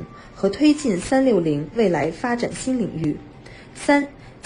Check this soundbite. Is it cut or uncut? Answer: uncut